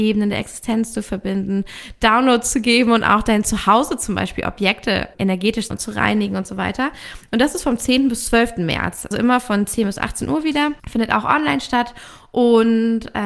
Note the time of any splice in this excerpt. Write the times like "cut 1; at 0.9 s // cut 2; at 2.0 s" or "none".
cut 1; at 5.1 s // cut 2; at 5.7 s // cut 3; at 9.1 s // cut 4; at 10.8 s